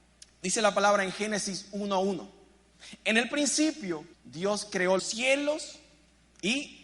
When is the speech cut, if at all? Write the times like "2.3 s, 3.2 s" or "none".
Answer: 4.1 s, 5.0 s